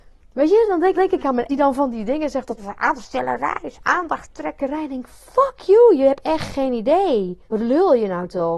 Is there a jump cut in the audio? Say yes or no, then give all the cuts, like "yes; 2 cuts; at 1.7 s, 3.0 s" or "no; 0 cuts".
yes; 4 cuts; at 0.9 s, 1.5 s, 2.6 s, 7.4 s